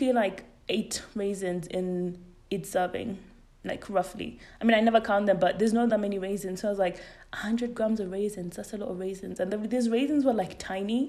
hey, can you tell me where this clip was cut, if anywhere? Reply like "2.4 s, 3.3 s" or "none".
none